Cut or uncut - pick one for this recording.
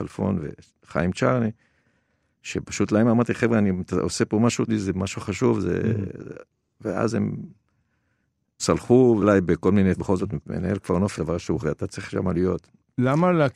cut